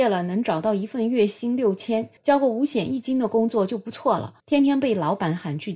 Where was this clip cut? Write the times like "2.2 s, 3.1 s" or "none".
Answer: 2.2 s, 4.4 s